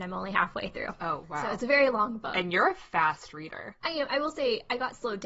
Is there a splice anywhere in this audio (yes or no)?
no